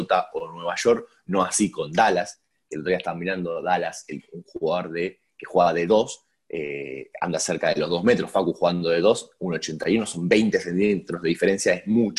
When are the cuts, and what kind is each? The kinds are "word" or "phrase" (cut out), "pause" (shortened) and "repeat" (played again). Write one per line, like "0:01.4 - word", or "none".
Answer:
none